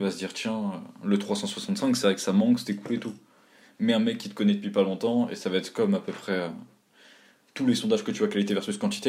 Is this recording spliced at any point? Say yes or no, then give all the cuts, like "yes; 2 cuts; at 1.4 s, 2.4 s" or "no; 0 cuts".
no; 0 cuts